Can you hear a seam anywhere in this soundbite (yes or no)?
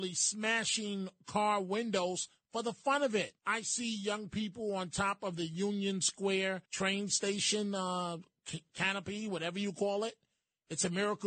yes